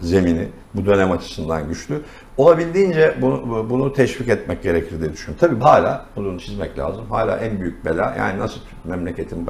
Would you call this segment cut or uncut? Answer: cut